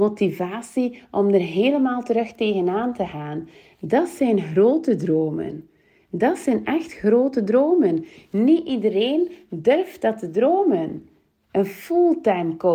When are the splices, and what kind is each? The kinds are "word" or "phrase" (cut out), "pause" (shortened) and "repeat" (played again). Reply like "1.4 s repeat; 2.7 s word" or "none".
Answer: none